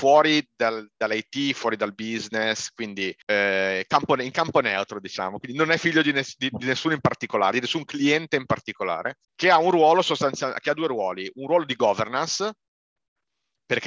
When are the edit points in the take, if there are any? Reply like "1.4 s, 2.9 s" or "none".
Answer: 3.2 s, 9.2 s